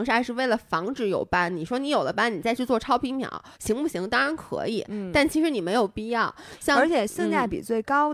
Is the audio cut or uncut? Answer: cut